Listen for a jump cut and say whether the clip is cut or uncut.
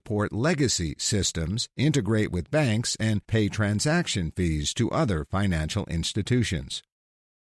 uncut